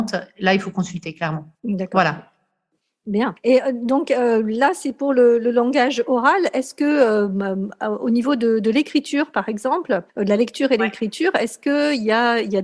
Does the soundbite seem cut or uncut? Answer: cut